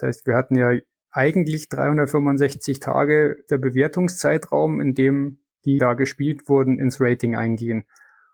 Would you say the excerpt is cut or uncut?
cut